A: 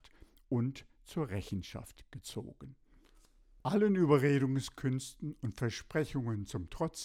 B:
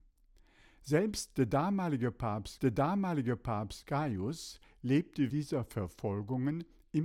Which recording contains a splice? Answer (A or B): B